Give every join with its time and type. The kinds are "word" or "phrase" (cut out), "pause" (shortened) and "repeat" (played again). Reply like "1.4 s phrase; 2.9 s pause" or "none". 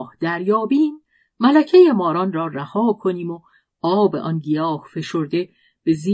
none